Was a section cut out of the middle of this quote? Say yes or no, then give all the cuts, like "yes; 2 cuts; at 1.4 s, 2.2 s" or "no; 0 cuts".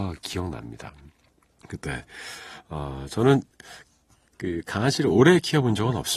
no; 0 cuts